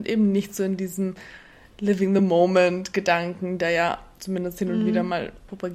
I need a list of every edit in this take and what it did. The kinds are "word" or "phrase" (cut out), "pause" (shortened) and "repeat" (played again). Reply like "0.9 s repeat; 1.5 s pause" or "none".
none

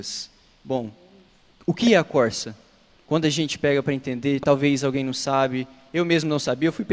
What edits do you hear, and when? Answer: none

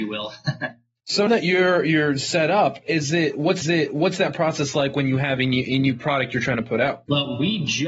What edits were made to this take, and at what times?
1.3 s word; 3.6 s repeat

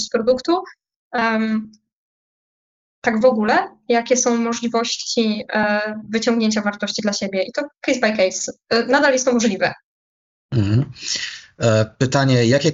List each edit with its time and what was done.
none

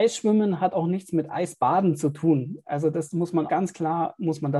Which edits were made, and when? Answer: 3.5 s word

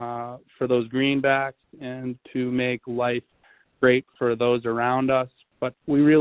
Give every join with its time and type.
none

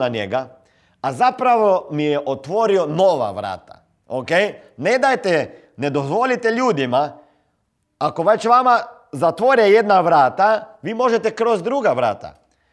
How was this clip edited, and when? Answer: none

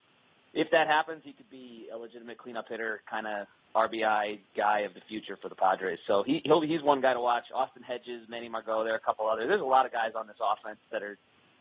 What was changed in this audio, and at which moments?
none

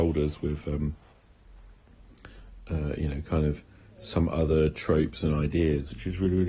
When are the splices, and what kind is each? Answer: none

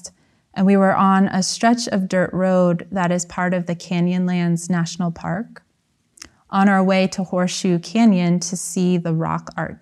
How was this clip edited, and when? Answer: none

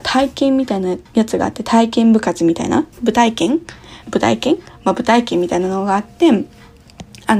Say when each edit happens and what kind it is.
1.1 s pause; 2.9 s pause; 4.0 s pause

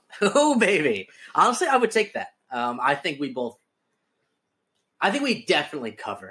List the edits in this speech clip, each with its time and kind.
none

